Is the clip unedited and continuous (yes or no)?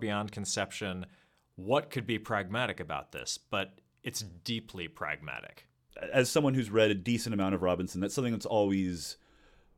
yes